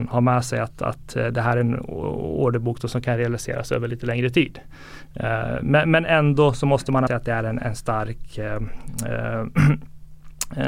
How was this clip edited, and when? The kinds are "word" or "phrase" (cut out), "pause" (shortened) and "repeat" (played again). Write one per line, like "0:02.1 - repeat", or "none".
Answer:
0:07.1 - word
0:07.6 - word